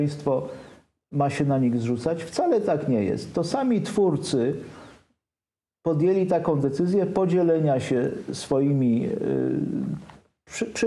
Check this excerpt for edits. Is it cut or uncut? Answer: uncut